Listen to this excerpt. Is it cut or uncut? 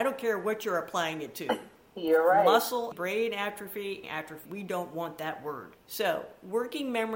cut